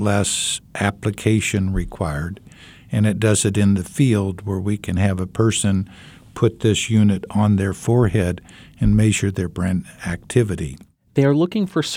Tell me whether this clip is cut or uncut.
uncut